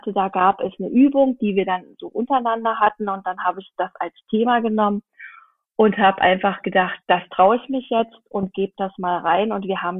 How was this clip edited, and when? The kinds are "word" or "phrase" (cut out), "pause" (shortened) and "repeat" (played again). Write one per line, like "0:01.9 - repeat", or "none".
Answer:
0:07.0 - pause